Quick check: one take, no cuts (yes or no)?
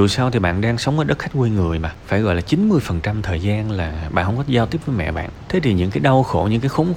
yes